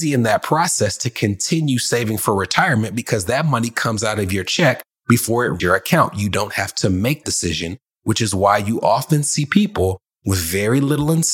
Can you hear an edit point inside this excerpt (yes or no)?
yes